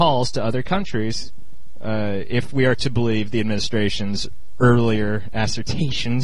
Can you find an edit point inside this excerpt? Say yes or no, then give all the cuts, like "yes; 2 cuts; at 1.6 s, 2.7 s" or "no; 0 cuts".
no; 0 cuts